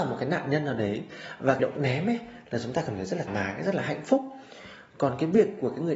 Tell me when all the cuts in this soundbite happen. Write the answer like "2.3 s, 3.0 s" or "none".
1.6 s, 3.3 s